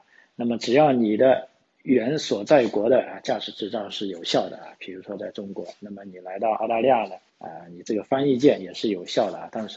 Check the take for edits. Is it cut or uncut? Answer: cut